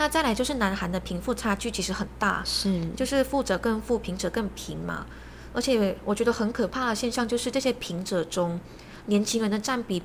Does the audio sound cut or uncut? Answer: uncut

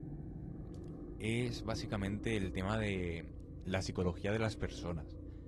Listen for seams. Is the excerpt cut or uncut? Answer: uncut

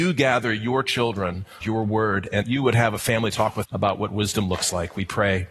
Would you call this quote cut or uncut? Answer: cut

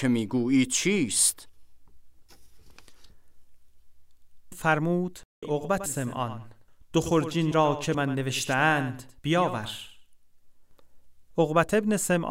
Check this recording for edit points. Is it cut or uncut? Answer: cut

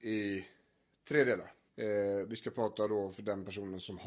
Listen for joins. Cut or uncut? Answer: cut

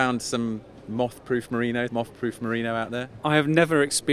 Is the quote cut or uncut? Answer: cut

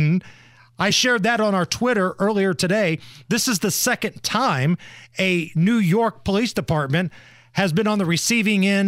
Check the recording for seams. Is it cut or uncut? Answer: uncut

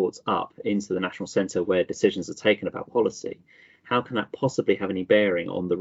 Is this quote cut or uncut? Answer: uncut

